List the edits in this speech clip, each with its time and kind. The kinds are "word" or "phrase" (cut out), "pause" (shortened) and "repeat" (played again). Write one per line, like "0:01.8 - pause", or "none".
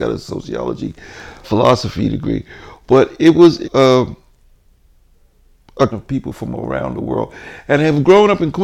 0:01.4 - word
0:03.6 - word
0:05.9 - word